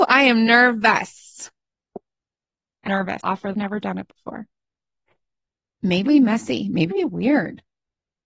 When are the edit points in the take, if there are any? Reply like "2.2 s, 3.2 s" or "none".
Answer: 2.9 s, 3.2 s, 3.5 s, 6.1 s, 6.9 s

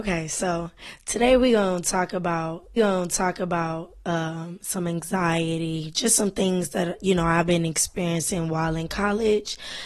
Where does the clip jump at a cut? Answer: 2.8 s

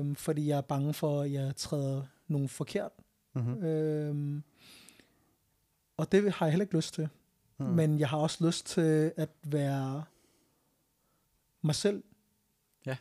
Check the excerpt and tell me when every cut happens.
none

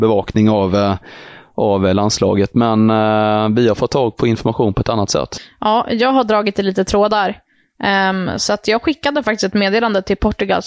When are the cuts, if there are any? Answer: none

